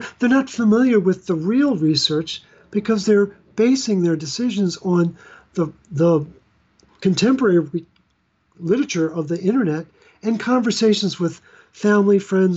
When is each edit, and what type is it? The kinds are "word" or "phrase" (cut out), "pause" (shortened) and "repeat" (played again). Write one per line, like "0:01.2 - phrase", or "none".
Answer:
none